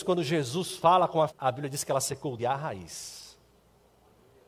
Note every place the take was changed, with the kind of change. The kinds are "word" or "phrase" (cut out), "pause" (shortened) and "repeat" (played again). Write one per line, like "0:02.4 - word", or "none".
0:01.3 - word
0:02.4 - word